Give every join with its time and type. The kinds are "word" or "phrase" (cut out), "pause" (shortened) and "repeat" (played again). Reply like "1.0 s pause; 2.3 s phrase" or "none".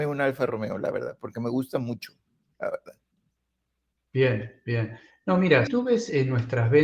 5.7 s word